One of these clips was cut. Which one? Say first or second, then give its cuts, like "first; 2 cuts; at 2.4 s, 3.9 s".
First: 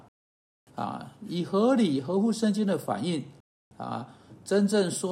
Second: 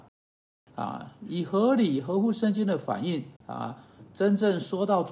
second; 1 cut; at 3.4 s